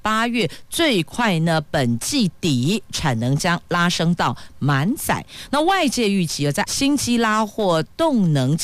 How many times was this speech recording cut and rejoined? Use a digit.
1